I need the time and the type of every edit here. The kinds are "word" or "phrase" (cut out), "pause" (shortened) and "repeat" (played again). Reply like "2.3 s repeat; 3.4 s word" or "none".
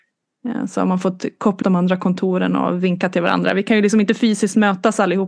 1.6 s word